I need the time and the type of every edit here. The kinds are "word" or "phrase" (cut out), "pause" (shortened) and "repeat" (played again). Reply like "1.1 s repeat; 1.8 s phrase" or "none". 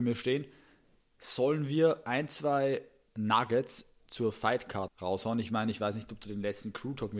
3.1 s word; 4.9 s word